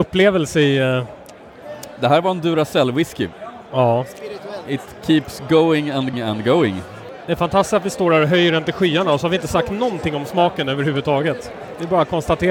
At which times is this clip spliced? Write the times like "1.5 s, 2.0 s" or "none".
6.1 s